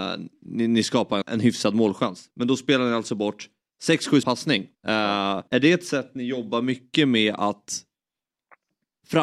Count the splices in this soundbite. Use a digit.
5